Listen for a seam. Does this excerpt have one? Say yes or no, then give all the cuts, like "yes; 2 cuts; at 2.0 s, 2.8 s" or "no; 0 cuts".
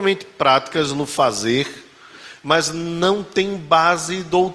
no; 0 cuts